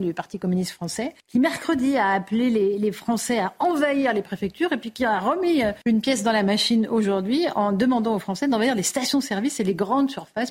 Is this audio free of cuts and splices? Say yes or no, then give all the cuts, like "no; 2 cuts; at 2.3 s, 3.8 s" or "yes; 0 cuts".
no; 2 cuts; at 1.2 s, 5.8 s